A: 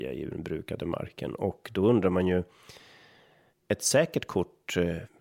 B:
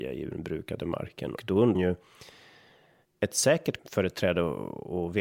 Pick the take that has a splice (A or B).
B